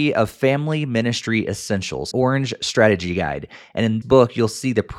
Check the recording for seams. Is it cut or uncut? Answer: cut